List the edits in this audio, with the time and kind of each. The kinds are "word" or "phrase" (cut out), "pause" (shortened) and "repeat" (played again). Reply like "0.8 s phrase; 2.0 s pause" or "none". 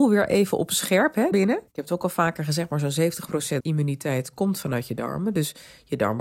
1.3 s word; 1.7 s pause; 3.6 s phrase